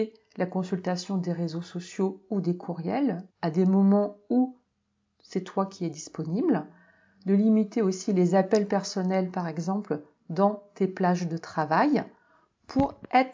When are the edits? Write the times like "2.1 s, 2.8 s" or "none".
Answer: 3.3 s